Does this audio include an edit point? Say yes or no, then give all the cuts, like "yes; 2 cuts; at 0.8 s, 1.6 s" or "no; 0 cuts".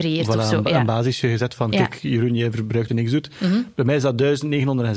yes; 1 cut; at 2.9 s